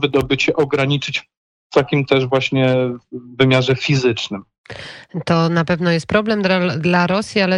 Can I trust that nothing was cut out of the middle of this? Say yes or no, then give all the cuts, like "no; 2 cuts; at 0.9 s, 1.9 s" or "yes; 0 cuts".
yes; 0 cuts